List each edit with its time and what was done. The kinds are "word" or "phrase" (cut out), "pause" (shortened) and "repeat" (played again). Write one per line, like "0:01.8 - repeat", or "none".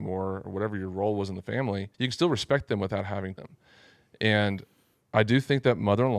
0:01.9 - pause
0:03.4 - phrase